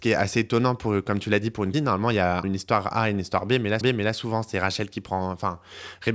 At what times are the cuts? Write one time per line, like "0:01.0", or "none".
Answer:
0:01.7
0:02.4
0:03.8